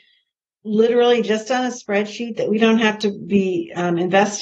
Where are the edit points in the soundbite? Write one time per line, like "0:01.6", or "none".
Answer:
none